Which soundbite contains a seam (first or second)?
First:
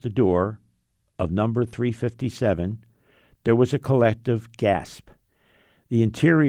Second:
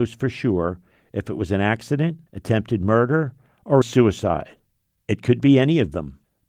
second